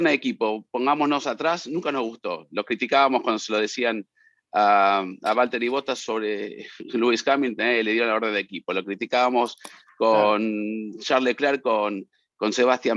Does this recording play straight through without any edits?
yes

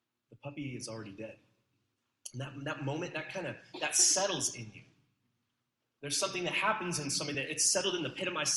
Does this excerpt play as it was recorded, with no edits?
yes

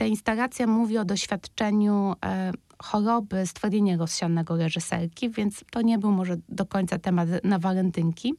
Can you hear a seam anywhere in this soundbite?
yes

